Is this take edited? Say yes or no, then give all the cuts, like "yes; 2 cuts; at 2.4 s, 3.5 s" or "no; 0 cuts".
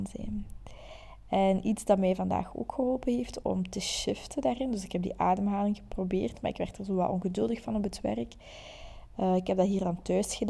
yes; 1 cut; at 3.4 s